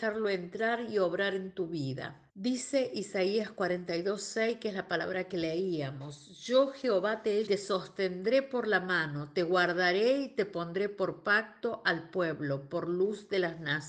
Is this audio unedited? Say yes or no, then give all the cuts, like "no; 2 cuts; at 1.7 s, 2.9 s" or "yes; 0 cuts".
no; 2 cuts; at 2.3 s, 7.5 s